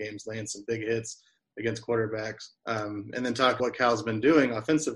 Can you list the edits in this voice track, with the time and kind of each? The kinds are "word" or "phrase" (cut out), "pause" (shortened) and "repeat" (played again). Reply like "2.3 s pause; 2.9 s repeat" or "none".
2.6 s pause; 3.6 s word